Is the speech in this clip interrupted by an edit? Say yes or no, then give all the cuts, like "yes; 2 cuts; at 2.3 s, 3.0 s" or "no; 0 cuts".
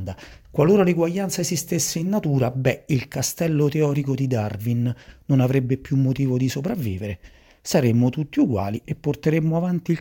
no; 0 cuts